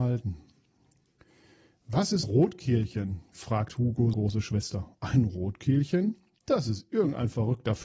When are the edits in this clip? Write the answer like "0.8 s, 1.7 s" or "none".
2.2 s, 4.1 s